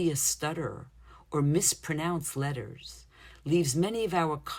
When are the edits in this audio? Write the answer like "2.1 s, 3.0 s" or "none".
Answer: none

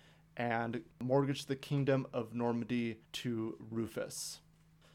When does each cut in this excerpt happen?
0.9 s, 3.0 s

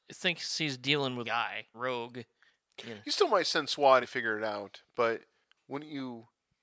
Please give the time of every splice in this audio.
1.2 s, 1.7 s, 4.0 s

